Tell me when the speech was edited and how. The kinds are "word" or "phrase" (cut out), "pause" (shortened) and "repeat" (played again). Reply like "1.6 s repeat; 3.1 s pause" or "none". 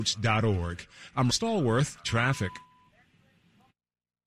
1.3 s word; 2.0 s word